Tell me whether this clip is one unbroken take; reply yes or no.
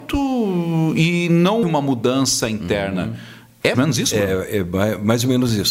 no